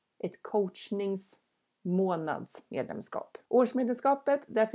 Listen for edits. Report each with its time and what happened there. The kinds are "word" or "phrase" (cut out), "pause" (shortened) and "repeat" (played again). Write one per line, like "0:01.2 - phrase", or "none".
0:03.4 - pause